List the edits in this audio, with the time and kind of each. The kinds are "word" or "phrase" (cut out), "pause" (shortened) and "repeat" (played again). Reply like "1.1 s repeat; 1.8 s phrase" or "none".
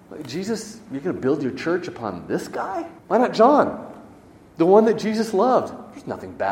3.0 s pause